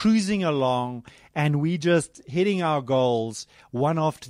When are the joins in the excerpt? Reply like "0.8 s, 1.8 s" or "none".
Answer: none